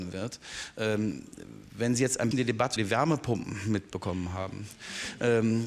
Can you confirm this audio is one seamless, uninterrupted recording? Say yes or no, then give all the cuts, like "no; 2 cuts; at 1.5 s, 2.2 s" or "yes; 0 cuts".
no; 2 cuts; at 2.3 s, 2.8 s